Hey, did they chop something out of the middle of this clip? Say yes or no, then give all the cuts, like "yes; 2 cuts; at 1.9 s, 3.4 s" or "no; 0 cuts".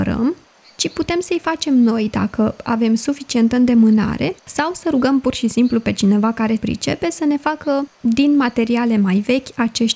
yes; 3 cuts; at 4.4 s, 6.6 s, 7.9 s